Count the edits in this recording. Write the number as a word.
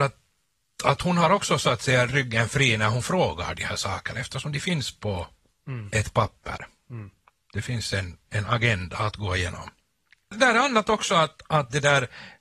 zero